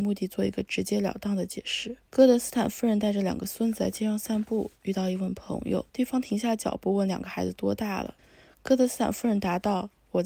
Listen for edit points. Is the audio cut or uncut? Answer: cut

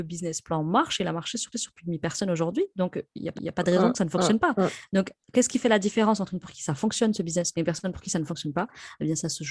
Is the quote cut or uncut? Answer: cut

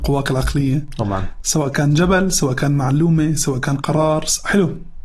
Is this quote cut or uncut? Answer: uncut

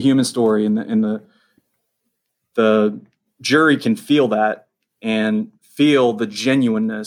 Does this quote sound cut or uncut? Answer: uncut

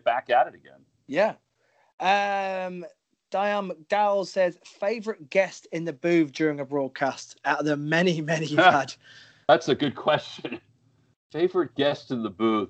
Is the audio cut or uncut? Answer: uncut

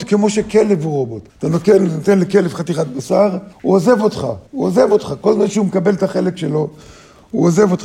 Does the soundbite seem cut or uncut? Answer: cut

